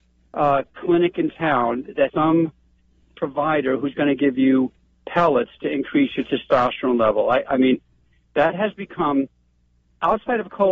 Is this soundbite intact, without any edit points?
no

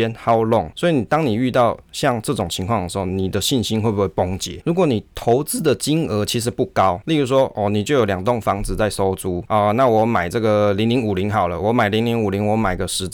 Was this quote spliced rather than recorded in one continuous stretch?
no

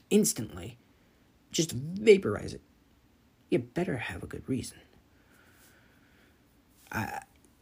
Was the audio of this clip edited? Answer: no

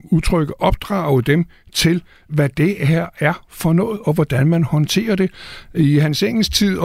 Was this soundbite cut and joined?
no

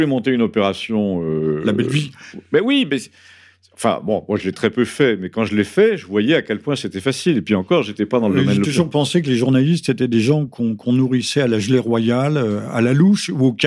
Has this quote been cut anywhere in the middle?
no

